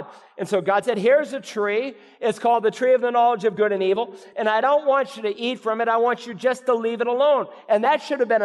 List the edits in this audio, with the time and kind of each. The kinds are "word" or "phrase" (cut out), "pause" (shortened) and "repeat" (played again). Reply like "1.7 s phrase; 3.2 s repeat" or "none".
none